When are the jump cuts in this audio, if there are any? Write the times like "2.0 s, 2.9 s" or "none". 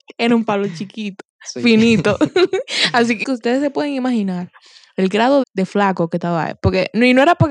3.2 s, 5.4 s